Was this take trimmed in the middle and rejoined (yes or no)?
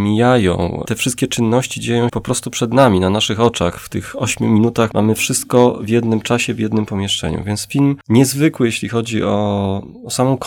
yes